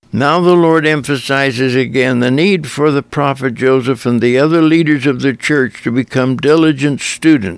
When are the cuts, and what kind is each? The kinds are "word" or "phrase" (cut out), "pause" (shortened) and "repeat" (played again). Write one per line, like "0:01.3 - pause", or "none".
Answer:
none